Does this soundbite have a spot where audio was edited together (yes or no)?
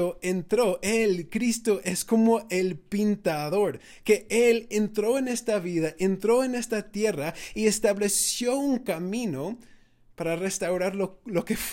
no